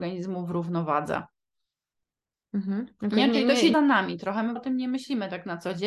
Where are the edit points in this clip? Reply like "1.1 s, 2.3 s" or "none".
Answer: 3.7 s, 4.6 s